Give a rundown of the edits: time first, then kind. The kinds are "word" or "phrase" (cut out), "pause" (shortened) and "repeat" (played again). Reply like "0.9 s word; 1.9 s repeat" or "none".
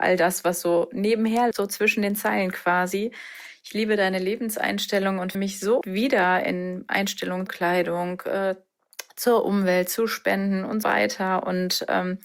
1.5 s word; 5.3 s word; 5.8 s word; 7.5 s word; 10.8 s word